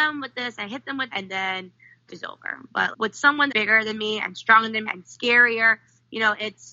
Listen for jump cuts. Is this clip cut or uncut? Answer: cut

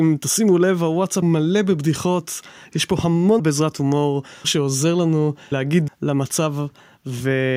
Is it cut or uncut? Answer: cut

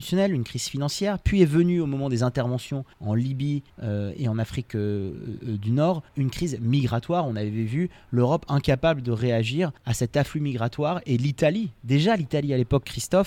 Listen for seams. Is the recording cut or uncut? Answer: cut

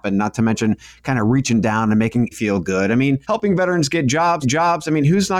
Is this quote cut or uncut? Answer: cut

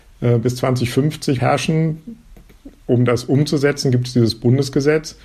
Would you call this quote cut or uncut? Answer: cut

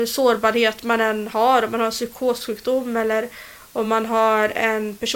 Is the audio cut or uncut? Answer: uncut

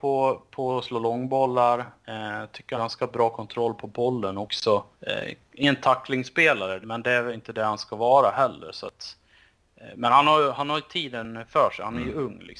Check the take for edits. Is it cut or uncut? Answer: cut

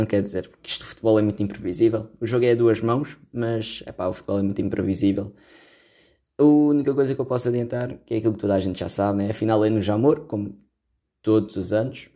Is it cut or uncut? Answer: uncut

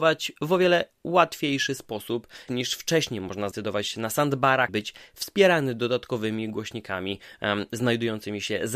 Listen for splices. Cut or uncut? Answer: cut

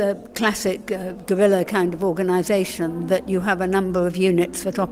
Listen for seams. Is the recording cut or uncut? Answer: uncut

